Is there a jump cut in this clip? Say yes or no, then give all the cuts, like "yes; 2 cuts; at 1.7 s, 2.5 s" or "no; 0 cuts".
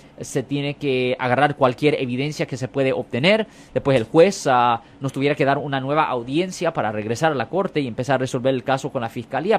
no; 0 cuts